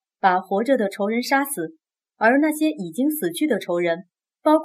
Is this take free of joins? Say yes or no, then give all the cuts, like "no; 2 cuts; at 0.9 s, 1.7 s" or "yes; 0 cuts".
yes; 0 cuts